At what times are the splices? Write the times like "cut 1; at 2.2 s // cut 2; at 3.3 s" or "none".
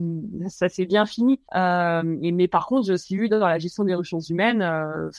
cut 1; at 1.5 s